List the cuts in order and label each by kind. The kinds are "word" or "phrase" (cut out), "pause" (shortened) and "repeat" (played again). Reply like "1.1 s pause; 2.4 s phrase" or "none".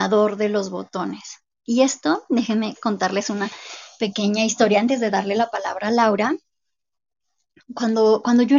none